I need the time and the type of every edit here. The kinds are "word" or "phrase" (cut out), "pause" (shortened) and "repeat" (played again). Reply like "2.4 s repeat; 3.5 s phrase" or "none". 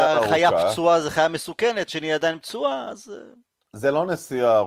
1.9 s word